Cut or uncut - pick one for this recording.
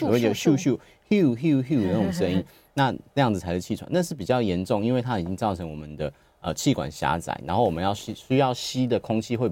uncut